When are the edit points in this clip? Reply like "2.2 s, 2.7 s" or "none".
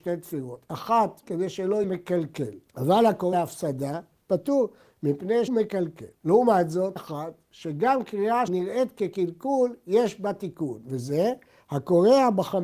1.2 s, 1.8 s, 2.7 s, 3.3 s, 5.5 s, 6.1 s, 7.0 s, 8.5 s